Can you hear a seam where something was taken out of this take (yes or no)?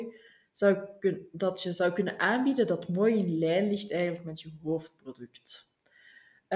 no